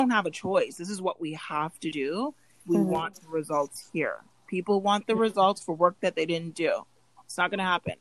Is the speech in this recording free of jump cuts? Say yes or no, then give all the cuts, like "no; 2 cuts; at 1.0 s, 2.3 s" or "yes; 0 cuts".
no; 1 cut; at 2.6 s